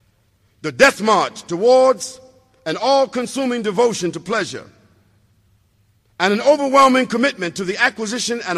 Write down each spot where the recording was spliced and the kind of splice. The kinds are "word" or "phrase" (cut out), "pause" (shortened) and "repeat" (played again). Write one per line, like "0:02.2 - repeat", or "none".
none